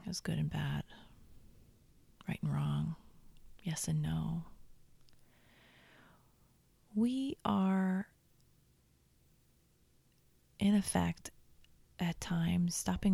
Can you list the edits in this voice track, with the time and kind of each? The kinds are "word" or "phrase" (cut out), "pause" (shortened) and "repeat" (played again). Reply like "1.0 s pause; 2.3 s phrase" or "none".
none

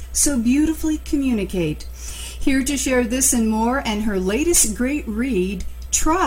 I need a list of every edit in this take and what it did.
none

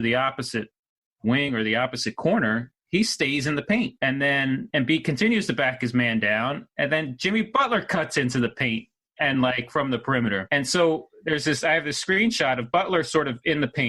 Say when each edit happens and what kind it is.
none

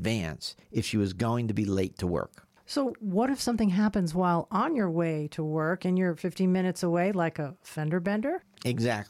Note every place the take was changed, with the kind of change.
none

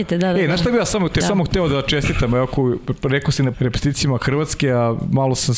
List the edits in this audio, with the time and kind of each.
1.2 s phrase; 3.5 s word

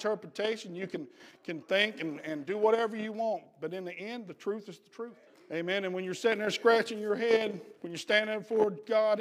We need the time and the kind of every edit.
5.3 s pause; 7.8 s pause

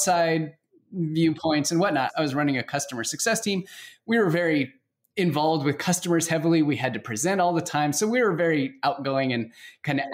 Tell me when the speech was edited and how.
none

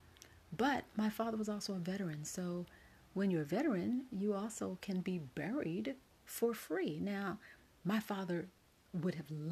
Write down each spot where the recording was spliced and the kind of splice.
none

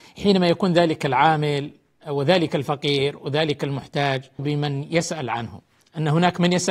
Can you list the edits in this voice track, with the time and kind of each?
4.4 s word

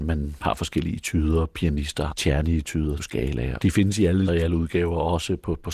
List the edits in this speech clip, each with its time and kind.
2.1 s word; 3.0 s word; 3.6 s word; 4.3 s word

